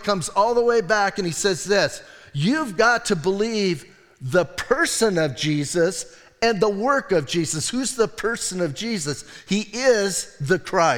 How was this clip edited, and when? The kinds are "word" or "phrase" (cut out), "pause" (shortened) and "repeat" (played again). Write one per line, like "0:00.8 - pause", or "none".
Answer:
none